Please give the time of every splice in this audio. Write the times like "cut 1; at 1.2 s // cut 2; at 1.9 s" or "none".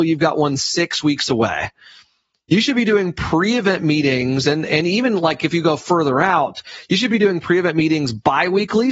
none